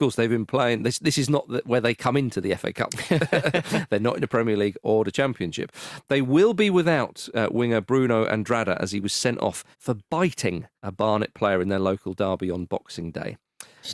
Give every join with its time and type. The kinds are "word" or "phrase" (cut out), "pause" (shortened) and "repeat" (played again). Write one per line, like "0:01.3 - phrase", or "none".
0:09.7 - pause
0:10.8 - pause